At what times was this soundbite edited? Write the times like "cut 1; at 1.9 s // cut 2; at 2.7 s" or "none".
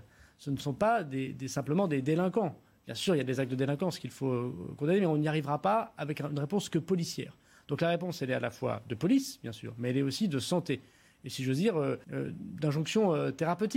cut 1; at 12.0 s